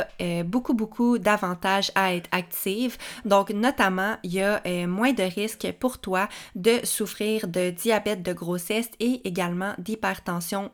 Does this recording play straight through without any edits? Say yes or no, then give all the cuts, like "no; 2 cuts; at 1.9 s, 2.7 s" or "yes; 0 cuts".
yes; 0 cuts